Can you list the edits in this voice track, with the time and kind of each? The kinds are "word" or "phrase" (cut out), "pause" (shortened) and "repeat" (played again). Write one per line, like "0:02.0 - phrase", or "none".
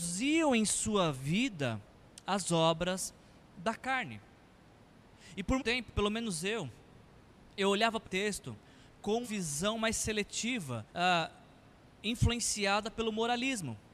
0:05.6 - word
0:08.0 - word
0:09.2 - word
0:10.9 - pause